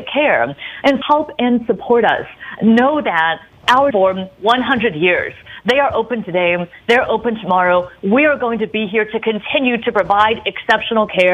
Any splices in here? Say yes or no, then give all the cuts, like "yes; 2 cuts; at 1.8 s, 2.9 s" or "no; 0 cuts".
yes; 2 cuts; at 1.0 s, 3.9 s